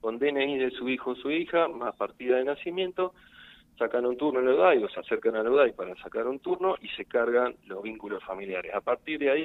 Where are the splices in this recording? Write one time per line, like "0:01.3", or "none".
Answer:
none